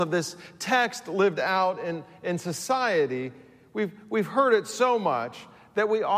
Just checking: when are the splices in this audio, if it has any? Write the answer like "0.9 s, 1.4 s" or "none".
none